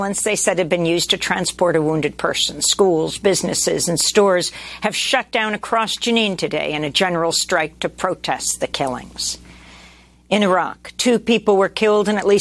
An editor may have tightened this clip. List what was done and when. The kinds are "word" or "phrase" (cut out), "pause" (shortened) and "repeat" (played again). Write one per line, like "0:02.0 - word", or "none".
none